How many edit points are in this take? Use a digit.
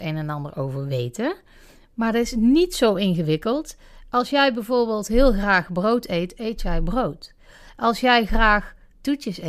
0